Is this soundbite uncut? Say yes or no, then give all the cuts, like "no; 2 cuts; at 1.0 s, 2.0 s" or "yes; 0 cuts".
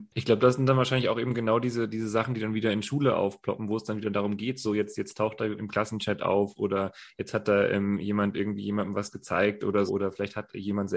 no; 2 cuts; at 5.6 s, 9.9 s